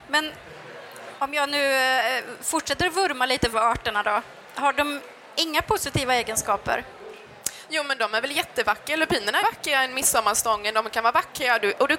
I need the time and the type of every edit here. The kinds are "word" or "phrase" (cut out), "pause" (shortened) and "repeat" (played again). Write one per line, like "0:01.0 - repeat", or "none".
0:03.5 - phrase
0:09.4 - phrase